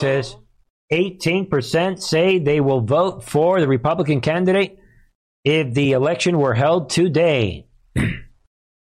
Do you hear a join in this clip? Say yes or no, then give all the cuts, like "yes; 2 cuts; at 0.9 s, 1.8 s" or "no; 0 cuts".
no; 0 cuts